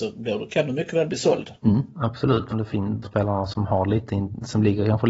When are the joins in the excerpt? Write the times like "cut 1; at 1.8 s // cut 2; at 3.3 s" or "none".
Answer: cut 1; at 1.6 s // cut 2; at 2.5 s // cut 3; at 3.0 s

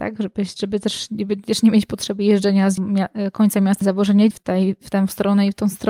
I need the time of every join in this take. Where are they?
cut 1; at 2.8 s // cut 2; at 3.8 s // cut 3; at 4.3 s

